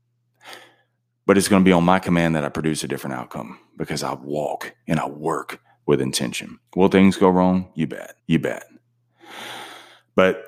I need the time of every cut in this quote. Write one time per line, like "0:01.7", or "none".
0:06.7
0:08.2